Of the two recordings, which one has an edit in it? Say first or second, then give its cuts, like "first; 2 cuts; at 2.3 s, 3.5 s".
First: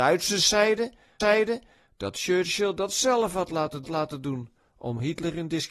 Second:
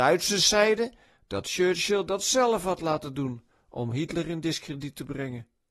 first; 2 cuts; at 1.2 s, 3.8 s